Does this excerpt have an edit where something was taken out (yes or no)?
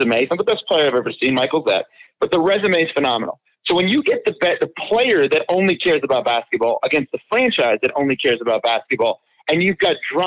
no